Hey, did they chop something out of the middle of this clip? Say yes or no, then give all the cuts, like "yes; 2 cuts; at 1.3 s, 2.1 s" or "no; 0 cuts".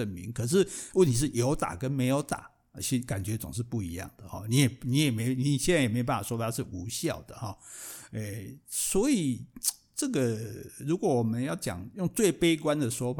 no; 0 cuts